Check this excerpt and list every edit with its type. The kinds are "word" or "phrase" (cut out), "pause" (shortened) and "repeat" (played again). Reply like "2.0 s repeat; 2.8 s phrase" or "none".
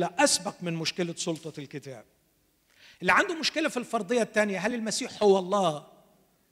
none